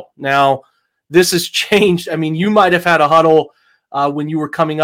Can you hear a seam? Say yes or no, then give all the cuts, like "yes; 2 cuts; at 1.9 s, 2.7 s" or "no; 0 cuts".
no; 0 cuts